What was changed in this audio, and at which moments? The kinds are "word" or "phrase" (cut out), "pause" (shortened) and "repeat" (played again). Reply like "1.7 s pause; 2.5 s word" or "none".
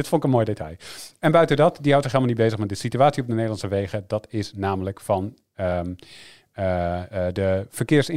none